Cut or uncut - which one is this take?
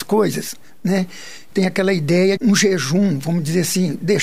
cut